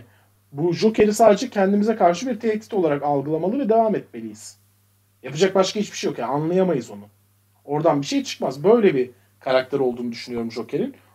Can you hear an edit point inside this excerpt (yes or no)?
no